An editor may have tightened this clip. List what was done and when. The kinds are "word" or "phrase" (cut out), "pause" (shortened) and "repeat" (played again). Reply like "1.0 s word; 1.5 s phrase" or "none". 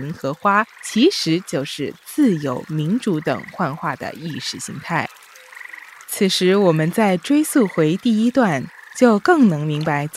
6.0 s pause